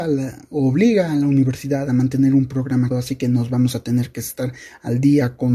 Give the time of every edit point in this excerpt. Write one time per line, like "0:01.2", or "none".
0:02.9